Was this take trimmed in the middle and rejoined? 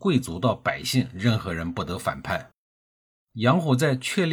no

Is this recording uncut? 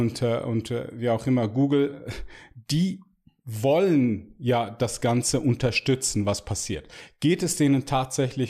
yes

